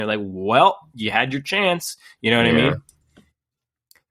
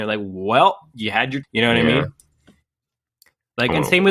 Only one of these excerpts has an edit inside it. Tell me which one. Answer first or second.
second